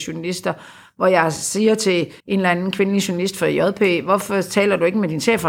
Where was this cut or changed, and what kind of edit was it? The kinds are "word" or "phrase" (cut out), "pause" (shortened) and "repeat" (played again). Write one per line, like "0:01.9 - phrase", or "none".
0:02.2 - pause